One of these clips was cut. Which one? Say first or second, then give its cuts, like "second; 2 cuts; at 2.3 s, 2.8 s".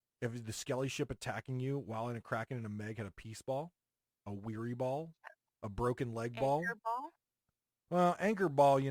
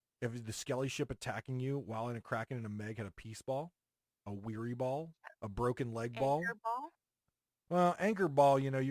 second; 1 cut; at 5.4 s